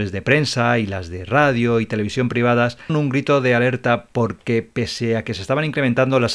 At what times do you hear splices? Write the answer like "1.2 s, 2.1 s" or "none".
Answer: 2.9 s